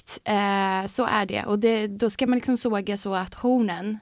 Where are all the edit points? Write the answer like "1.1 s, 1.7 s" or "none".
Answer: none